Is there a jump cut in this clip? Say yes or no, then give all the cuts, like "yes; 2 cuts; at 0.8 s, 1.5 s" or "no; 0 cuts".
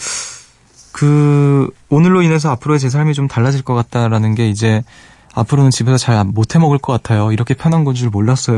no; 0 cuts